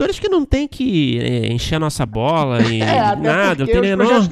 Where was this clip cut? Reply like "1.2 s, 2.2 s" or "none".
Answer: none